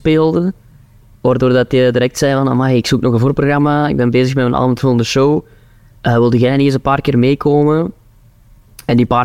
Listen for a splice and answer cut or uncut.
uncut